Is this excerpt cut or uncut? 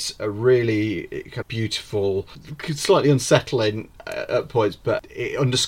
cut